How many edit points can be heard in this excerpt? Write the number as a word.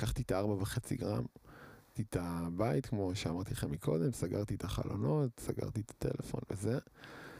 one